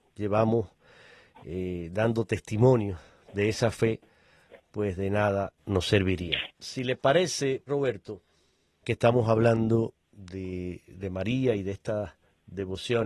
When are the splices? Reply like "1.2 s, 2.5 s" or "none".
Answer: 6.5 s, 7.7 s, 8.8 s